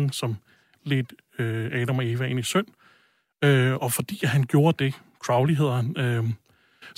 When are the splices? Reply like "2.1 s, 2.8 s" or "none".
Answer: none